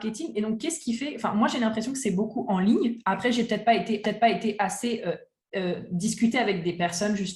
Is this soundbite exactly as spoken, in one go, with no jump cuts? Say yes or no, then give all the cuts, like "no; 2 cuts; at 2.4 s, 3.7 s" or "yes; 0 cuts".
no; 1 cut; at 4.0 s